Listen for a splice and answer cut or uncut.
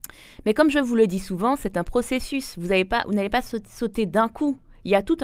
uncut